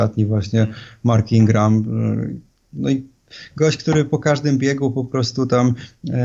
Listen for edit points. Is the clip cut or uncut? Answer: uncut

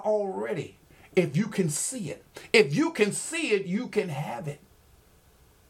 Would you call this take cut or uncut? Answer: uncut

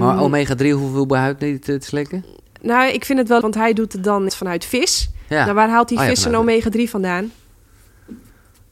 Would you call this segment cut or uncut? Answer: cut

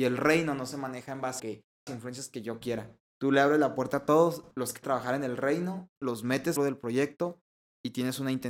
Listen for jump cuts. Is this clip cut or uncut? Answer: cut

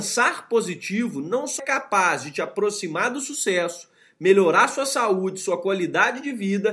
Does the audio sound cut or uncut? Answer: cut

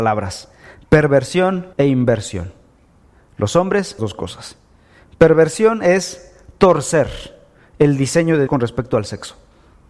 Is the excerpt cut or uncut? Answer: cut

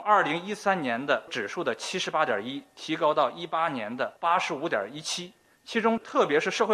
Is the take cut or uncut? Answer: uncut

